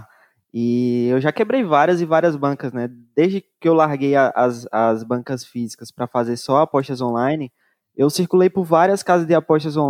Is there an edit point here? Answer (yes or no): no